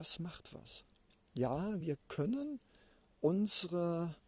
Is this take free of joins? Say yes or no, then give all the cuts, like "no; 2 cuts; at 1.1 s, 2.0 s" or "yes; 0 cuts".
yes; 0 cuts